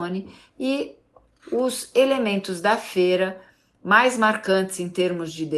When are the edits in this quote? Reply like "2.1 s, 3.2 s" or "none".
none

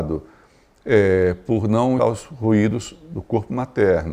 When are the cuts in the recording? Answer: 2.0 s

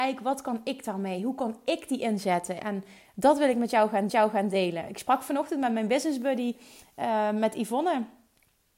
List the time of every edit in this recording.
4.1 s

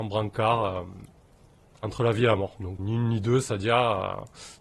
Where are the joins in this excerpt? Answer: 2.8 s

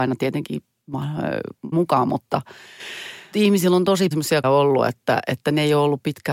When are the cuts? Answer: 1.7 s, 3.3 s, 4.1 s, 4.4 s

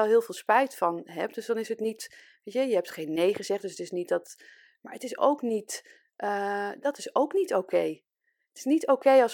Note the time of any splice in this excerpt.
none

